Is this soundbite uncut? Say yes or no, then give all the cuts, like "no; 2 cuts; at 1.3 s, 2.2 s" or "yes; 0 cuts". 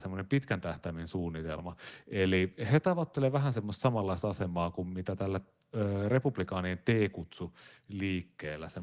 yes; 0 cuts